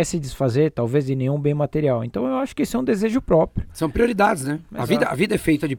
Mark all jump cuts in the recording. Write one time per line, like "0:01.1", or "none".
none